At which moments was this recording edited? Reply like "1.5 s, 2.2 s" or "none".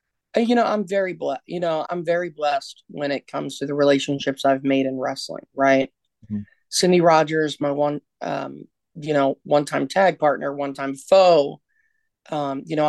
1.8 s